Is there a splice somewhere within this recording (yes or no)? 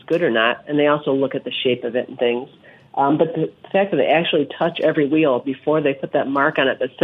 no